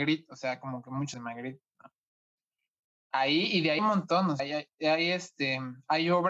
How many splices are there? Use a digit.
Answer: 3